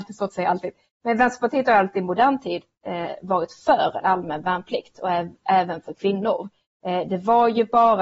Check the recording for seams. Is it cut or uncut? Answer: uncut